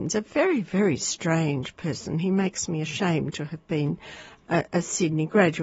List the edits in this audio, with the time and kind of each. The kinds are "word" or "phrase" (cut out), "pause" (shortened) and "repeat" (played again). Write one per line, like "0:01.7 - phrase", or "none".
none